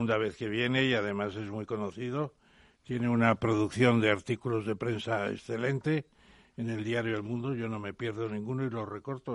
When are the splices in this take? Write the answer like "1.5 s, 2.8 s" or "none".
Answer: none